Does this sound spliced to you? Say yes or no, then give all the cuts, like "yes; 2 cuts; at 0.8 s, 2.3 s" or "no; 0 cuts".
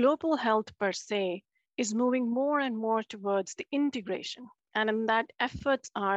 no; 0 cuts